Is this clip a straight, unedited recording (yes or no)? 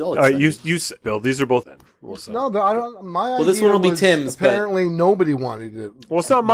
no